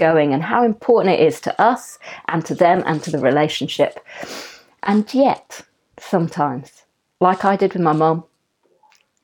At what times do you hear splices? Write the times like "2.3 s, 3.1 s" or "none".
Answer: none